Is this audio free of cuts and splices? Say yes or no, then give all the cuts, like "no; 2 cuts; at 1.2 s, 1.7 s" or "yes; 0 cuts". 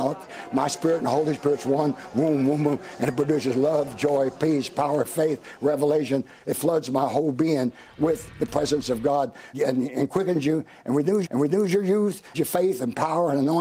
no; 3 cuts; at 9.5 s, 11.2 s, 12.3 s